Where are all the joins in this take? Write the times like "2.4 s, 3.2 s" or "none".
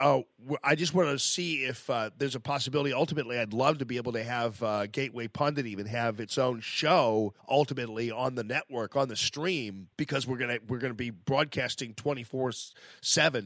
7.4 s, 9.9 s